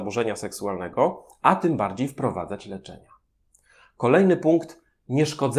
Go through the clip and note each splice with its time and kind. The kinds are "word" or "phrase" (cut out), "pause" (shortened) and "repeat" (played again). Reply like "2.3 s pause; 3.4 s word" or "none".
none